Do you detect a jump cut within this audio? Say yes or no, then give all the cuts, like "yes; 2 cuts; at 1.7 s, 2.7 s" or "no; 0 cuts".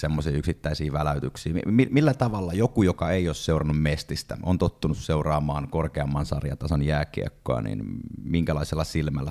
no; 0 cuts